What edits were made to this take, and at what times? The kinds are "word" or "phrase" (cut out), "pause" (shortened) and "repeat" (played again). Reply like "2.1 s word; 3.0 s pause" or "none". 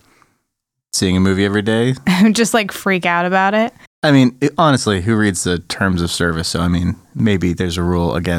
none